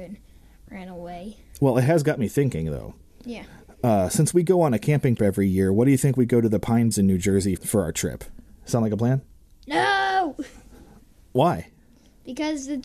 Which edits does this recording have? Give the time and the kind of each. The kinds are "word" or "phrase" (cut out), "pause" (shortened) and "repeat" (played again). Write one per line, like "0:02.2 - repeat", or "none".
0:05.2 - word
0:06.9 - word
0:07.6 - word